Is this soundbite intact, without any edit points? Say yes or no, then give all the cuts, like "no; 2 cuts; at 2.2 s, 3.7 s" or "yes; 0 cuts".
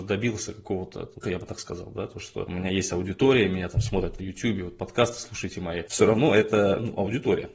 no; 2 cuts; at 1.2 s, 4.2 s